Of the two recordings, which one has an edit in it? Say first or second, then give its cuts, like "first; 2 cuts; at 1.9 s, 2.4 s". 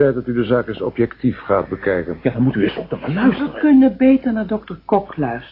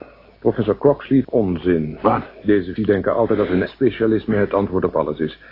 second; 3 cuts; at 1.2 s, 2.8 s, 3.7 s